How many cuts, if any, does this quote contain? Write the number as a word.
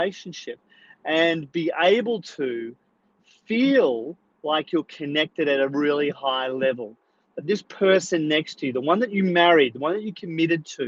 zero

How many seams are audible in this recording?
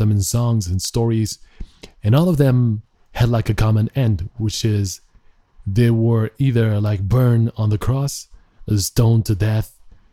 zero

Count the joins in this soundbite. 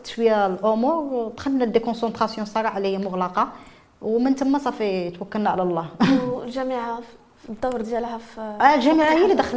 zero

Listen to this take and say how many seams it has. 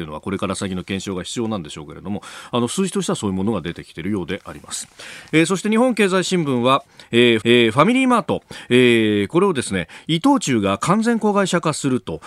one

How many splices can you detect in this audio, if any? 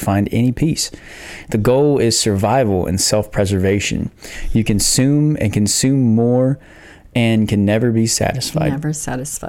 zero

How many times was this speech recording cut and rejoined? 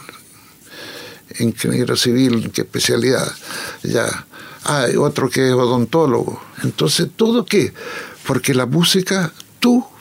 three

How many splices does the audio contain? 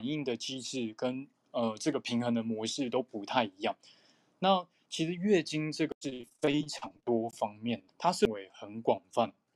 one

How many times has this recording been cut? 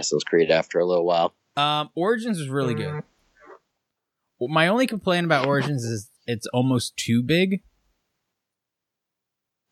zero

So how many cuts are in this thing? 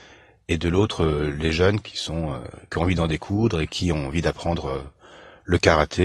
zero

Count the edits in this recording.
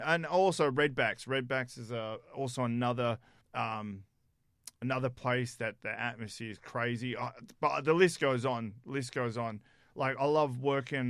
one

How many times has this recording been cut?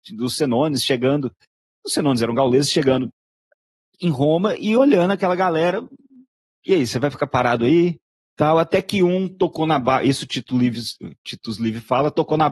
zero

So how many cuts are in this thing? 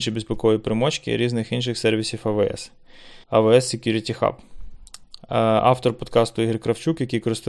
one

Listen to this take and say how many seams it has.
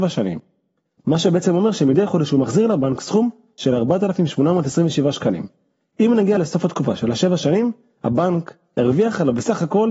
zero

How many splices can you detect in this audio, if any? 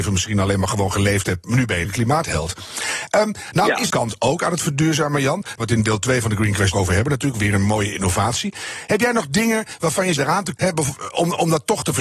six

